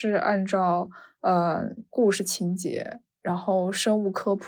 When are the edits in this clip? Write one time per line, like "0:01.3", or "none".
0:01.8